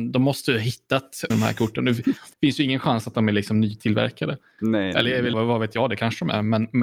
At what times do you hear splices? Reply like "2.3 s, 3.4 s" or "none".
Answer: 1.3 s, 2.3 s, 5.3 s